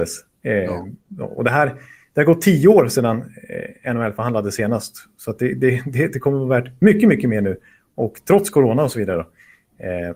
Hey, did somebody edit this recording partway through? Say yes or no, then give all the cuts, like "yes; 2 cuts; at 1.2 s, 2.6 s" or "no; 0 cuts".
no; 0 cuts